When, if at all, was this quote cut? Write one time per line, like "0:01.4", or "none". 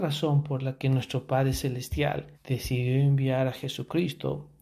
0:02.3